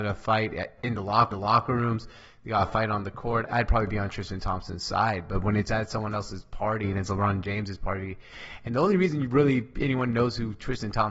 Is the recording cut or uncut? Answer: cut